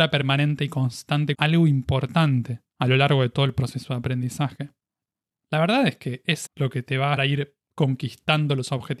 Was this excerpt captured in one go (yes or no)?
no